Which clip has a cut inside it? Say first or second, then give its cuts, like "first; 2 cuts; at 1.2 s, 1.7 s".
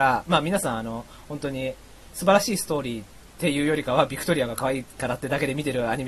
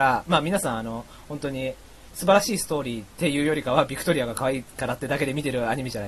second; 1 cut; at 3.1 s